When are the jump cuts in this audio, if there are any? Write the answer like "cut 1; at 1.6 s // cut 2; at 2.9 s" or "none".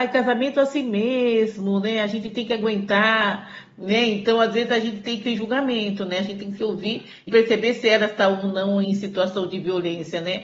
cut 1; at 5.2 s // cut 2; at 7.3 s // cut 3; at 8.8 s